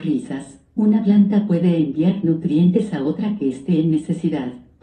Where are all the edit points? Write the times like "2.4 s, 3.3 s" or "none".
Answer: none